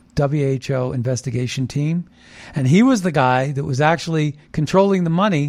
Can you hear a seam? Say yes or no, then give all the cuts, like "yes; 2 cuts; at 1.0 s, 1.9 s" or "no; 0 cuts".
no; 0 cuts